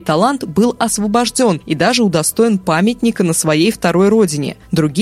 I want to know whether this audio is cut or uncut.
uncut